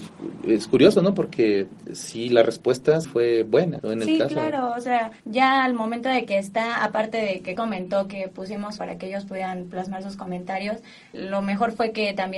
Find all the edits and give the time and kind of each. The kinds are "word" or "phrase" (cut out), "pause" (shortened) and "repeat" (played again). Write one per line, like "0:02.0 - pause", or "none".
0:03.0 - word
0:03.8 - word
0:05.2 - pause
0:07.6 - phrase
0:08.8 - phrase
0:11.1 - word